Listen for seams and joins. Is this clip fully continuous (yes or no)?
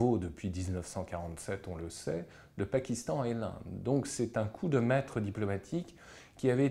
yes